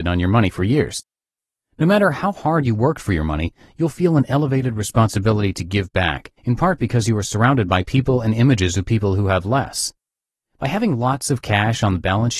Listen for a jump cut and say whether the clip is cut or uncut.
cut